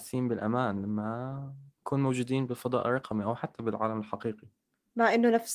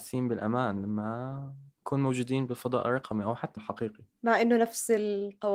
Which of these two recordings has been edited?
second; 2 cuts; at 3.6 s, 4.1 s

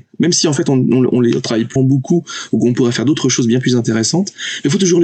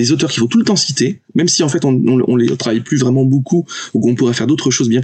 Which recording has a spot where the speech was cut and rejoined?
first; 1 cut; at 1.8 s

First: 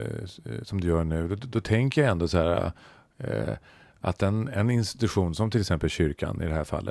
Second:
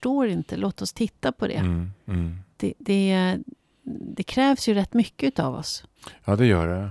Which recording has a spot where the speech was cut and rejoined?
second; 1 cut; at 2.0 s

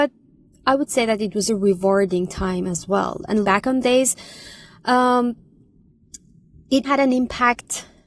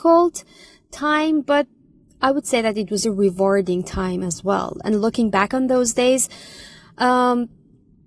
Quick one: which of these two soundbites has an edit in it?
first; 3 cuts; at 3.4 s, 3.8 s, 6.8 s

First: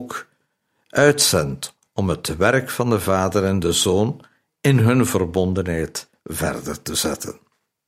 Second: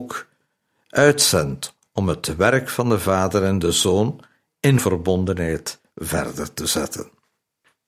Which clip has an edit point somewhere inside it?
second; 1 cut; at 4.8 s

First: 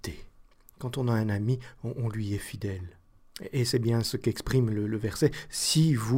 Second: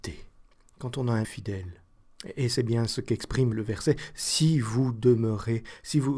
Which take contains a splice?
second; 2 cuts; at 1.2 s, 3.5 s

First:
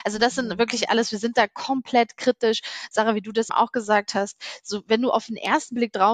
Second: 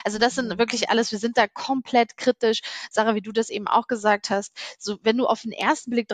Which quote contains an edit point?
first; 1 cut; at 3.5 s

